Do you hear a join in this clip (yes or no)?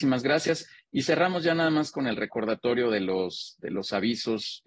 no